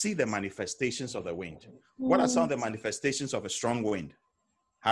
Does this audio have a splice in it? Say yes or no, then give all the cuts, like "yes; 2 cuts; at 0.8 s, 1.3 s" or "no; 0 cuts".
no; 0 cuts